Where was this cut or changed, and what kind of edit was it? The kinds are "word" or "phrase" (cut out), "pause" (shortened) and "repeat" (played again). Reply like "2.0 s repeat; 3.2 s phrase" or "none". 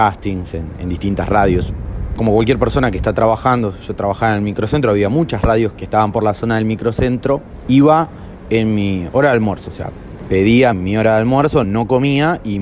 5.7 s word; 10.7 s word; 11.6 s word